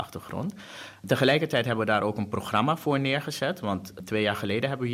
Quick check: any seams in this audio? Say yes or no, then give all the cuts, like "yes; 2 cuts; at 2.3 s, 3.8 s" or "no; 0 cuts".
no; 0 cuts